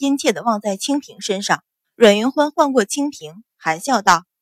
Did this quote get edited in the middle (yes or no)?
yes